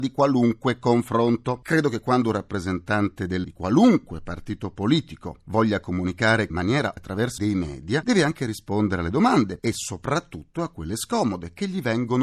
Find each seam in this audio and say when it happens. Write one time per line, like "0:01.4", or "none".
0:03.4
0:06.5
0:07.0
0:07.4
0:09.6